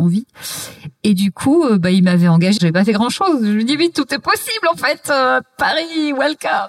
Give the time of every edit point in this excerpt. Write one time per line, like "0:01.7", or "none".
0:02.6